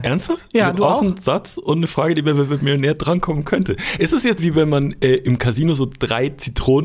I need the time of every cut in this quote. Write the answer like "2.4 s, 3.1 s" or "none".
4.4 s